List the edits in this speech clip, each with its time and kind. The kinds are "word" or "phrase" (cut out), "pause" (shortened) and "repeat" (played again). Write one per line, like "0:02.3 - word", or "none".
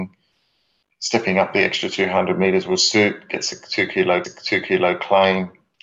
0:04.2 - repeat